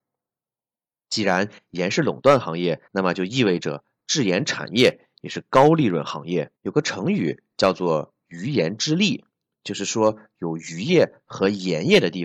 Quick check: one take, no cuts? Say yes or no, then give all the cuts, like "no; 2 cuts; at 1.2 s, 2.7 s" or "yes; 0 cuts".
no; 3 cuts; at 2.9 s, 6.6 s, 9.3 s